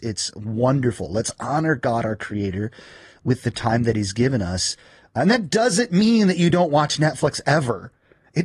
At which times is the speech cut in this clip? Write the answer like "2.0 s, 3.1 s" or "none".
none